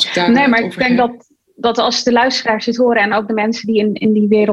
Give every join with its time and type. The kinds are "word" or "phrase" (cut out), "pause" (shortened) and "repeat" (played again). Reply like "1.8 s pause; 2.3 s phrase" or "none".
none

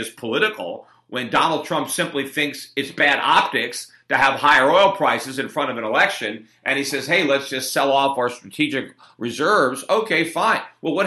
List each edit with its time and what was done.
none

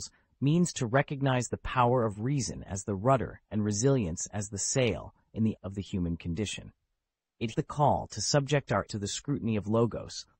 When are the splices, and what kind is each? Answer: 5.6 s word; 7.5 s word; 8.9 s word

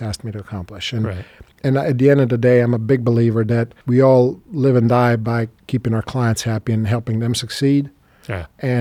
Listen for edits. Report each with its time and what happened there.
1.5 s pause; 3.8 s pause

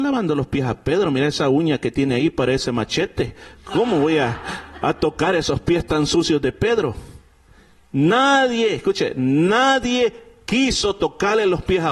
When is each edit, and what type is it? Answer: none

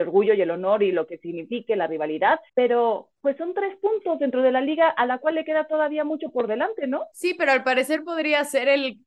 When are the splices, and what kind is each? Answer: 2.5 s pause; 7.1 s pause

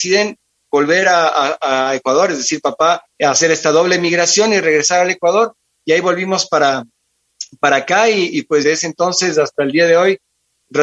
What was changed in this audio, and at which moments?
3.1 s pause; 8.6 s phrase

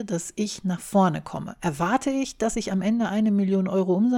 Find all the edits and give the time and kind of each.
none

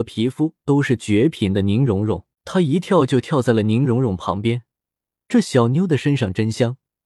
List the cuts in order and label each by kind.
2.3 s pause

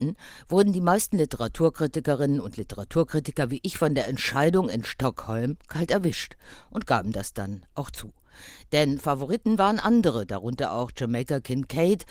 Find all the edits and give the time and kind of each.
none

